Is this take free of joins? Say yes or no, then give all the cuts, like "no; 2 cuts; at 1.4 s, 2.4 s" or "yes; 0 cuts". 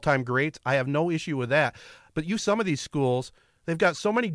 no; 1 cut; at 2.4 s